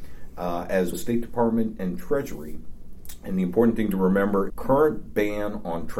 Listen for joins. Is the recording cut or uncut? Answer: cut